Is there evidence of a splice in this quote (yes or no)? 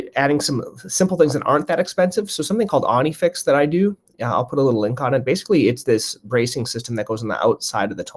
no